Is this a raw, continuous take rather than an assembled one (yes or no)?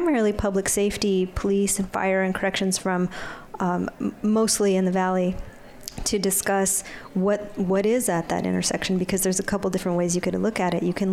yes